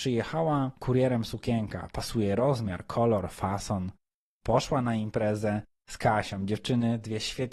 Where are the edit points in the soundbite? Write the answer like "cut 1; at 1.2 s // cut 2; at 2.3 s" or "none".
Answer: none